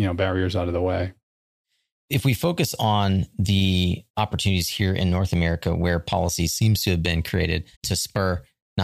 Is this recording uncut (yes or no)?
no